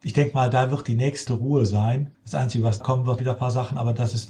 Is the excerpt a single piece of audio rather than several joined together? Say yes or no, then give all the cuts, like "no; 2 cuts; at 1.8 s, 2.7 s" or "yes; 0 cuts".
no; 4 cuts; at 1.3 s, 2.1 s, 2.8 s, 3.2 s